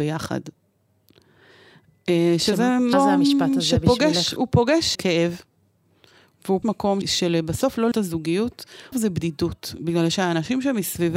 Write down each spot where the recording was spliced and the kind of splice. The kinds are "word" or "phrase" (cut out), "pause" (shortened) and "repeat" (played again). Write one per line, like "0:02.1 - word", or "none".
0:02.9 - word
0:04.9 - word
0:06.6 - word
0:07.0 - word
0:07.9 - word
0:08.9 - word